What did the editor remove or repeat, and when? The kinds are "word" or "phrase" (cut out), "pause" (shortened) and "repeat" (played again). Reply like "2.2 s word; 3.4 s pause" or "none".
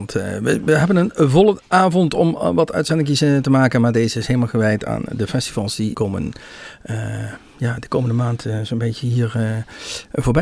5.9 s word